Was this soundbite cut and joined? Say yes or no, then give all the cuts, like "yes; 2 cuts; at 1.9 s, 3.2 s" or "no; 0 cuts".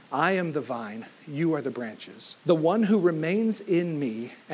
yes; 1 cut; at 2.4 s